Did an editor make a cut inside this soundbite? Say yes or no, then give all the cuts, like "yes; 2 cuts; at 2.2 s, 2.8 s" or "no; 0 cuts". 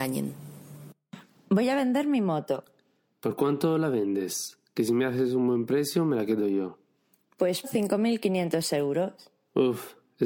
yes; 1 cut; at 7.6 s